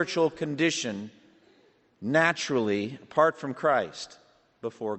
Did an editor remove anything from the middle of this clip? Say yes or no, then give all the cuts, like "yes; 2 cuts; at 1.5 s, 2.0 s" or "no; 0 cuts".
no; 0 cuts